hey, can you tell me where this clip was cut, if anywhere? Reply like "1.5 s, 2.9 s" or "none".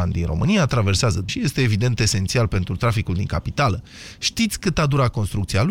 1.3 s